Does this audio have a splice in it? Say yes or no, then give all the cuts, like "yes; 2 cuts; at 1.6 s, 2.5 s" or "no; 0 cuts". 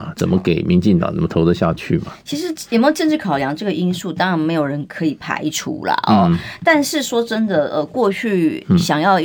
no; 0 cuts